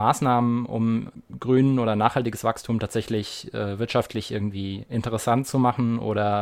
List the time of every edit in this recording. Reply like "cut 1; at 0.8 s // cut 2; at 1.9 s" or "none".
none